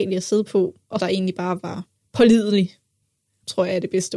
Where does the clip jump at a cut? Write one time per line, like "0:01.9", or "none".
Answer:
0:01.0
0:02.0